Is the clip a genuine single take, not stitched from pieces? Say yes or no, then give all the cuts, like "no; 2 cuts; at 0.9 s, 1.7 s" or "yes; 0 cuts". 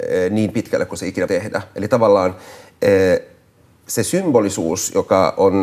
no; 1 cut; at 1.3 s